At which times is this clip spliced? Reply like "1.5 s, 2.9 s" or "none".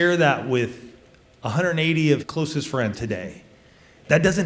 2.2 s, 2.9 s